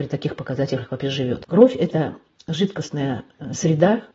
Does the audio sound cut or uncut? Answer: uncut